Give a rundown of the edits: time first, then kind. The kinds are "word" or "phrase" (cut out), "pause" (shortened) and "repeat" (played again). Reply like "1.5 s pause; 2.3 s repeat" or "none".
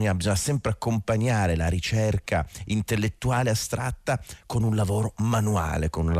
none